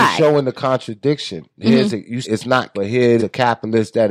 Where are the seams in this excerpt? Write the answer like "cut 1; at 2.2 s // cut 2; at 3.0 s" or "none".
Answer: cut 1; at 2.2 s // cut 2; at 2.7 s // cut 3; at 3.2 s